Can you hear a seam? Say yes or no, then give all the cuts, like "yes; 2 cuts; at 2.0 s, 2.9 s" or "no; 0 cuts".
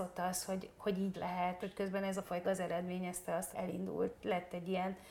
yes; 4 cuts; at 1.1 s, 1.6 s, 2.4 s, 3.5 s